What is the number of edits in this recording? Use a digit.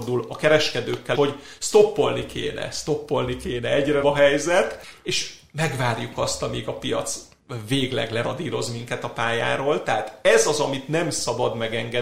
2